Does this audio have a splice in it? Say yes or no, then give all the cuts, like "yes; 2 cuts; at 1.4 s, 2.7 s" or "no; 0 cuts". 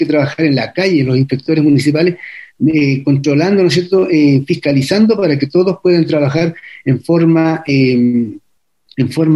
no; 0 cuts